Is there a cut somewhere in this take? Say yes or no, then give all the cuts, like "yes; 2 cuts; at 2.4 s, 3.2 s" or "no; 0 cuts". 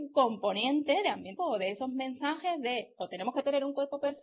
yes; 1 cut; at 1.4 s